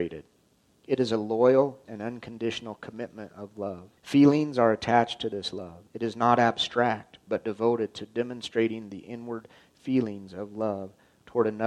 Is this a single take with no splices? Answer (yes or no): no